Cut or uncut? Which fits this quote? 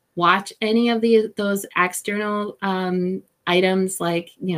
uncut